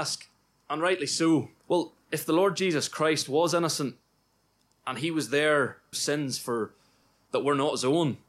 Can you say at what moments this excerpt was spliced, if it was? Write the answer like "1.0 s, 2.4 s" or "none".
1.6 s, 5.9 s